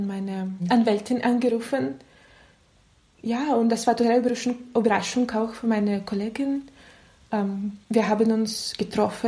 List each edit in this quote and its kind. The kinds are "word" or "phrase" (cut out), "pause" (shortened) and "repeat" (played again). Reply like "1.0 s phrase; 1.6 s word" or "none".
7.8 s pause